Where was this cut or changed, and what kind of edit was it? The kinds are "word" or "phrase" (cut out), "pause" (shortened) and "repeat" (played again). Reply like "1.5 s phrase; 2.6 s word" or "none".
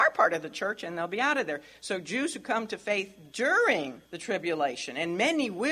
4.1 s pause